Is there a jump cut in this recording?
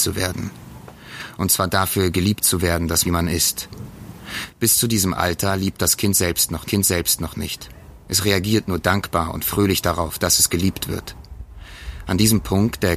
yes; 2 cuts; at 3.0 s, 6.7 s

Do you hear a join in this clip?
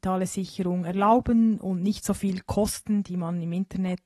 no; 0 cuts

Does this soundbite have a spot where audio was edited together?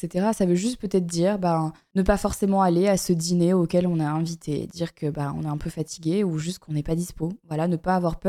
no; 0 cuts

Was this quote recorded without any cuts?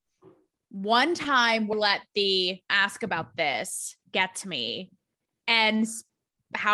no; 2 cuts; at 1.7 s, 2.7 s

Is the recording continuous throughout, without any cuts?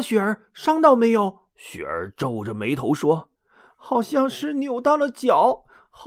no; 2 cuts; at 1.5 s, 3.3 s

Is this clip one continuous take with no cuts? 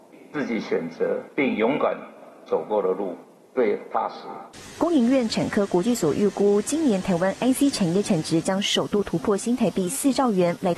yes; 0 cuts

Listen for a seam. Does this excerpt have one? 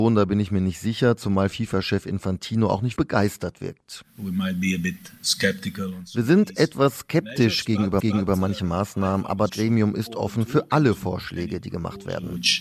yes; 3 cuts; at 3.0 s, 8.0 s, 9.5 s

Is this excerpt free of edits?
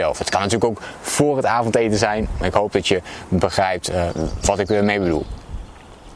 yes; 0 cuts

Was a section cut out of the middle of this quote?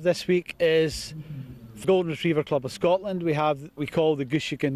yes; 2 cuts; at 1.8 s, 3.8 s

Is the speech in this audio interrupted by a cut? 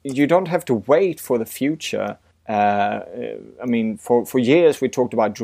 no; 0 cuts

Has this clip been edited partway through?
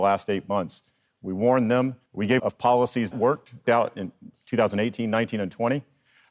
yes; 4 cuts; at 2.1 s, 2.4 s, 3.1 s, 3.6 s

